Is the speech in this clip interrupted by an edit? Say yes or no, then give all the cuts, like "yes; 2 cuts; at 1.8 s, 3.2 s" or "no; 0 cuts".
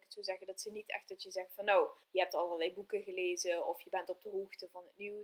yes; 1 cut; at 2.0 s